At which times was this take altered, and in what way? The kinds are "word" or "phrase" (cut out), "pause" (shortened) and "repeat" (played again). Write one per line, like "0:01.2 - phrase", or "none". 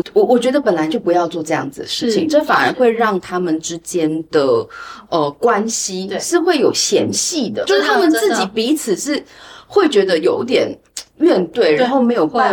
0:07.7 - word